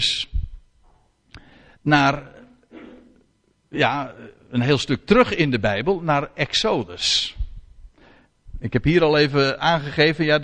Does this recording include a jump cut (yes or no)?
no